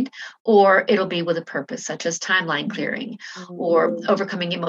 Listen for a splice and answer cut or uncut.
uncut